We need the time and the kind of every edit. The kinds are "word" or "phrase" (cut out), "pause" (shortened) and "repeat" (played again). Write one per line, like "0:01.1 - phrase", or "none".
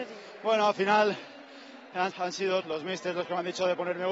0:02.1 - word
0:02.6 - word